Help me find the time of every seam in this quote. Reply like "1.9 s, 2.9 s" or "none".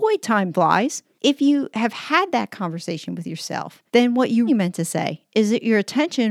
3.9 s, 4.5 s